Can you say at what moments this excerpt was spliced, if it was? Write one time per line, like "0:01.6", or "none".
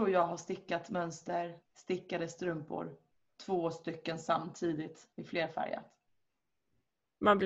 0:01.6
0:03.2
0:05.1